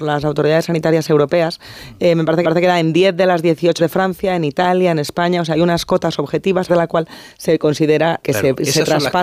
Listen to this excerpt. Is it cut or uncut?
cut